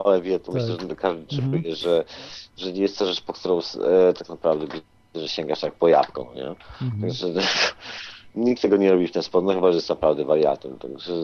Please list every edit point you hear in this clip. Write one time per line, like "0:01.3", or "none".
none